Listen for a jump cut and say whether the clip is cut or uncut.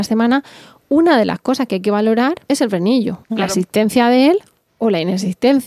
cut